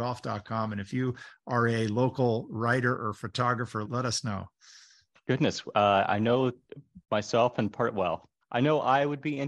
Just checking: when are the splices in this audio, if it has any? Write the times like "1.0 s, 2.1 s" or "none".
3.8 s, 7.0 s, 8.4 s